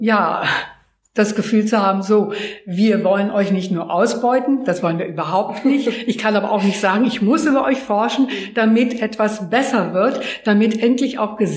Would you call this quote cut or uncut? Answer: uncut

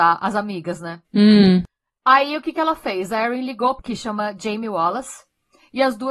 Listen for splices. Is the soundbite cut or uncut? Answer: cut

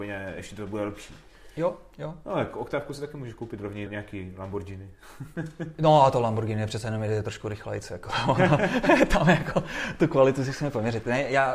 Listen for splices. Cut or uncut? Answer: cut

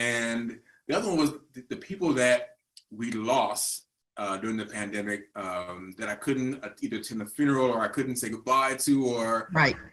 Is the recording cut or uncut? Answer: uncut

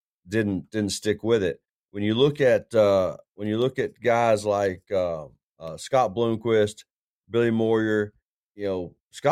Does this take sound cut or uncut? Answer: uncut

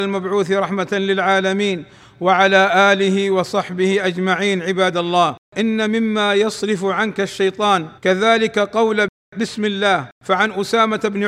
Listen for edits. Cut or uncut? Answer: cut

